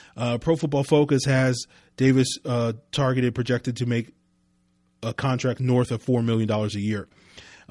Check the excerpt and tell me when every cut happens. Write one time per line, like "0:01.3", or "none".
none